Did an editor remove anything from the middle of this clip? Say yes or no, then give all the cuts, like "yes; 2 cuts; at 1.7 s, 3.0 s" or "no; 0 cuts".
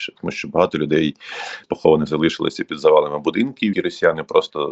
yes; 3 cuts; at 1.6 s, 2.1 s, 3.7 s